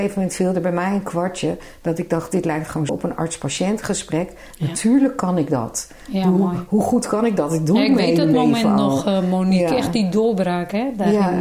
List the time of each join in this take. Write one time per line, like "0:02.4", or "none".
0:02.9